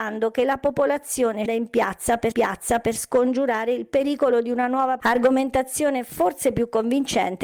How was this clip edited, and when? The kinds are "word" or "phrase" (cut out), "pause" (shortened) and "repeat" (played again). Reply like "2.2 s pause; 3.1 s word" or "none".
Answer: 1.5 s word; 2.3 s repeat; 5.0 s word